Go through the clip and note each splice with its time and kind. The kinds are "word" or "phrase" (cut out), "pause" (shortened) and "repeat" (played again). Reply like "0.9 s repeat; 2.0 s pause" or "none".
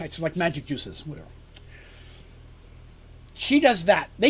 3.3 s pause